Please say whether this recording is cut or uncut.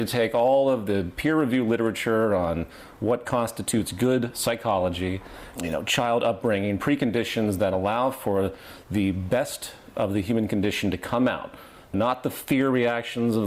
cut